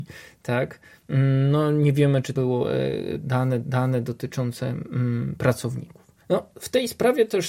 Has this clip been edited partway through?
yes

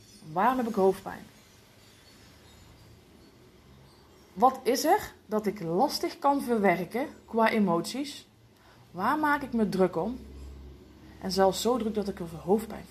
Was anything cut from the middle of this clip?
no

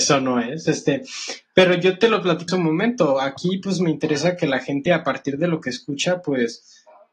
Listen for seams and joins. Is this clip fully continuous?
no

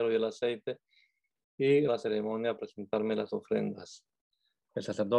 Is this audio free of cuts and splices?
no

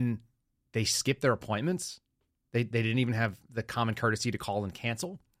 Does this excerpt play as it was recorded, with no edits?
yes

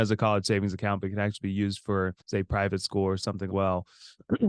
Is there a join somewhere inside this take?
yes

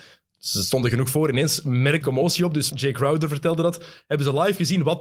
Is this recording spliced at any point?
yes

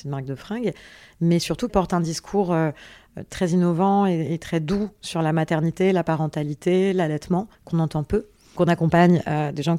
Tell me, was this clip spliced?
yes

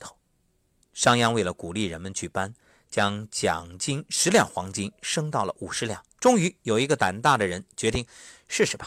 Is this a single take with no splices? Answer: no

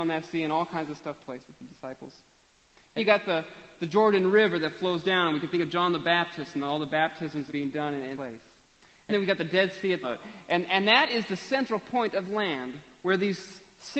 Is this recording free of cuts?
no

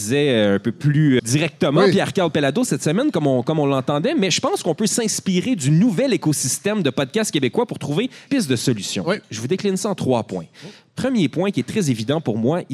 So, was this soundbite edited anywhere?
yes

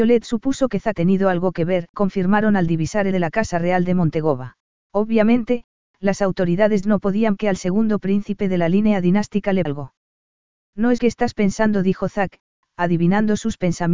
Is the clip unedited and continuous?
no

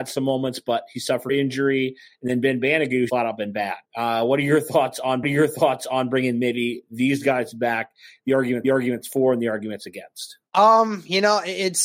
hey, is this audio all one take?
no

